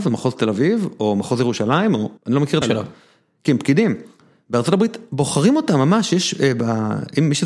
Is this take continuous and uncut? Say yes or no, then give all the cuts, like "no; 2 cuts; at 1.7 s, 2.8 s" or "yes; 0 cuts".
no; 2 cuts; at 2.2 s, 2.6 s